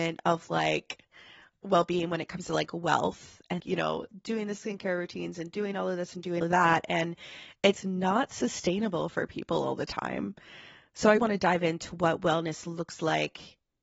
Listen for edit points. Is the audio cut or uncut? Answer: cut